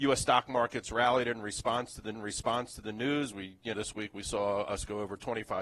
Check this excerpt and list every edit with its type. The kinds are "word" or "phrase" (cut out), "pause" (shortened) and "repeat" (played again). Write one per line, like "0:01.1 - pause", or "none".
0:02.1 - repeat
0:03.7 - word